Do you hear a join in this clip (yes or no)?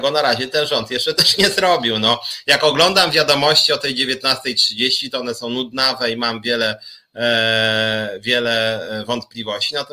no